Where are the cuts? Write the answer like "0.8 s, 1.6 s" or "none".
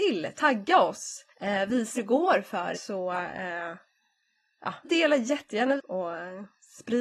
1.3 s, 2.0 s, 2.7 s, 4.8 s, 5.8 s